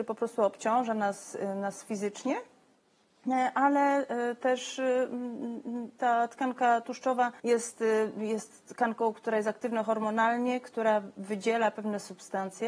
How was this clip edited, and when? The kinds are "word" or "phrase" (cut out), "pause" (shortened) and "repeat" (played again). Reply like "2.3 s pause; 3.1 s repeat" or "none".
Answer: 7.4 s pause